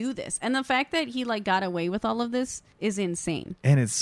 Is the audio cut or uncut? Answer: cut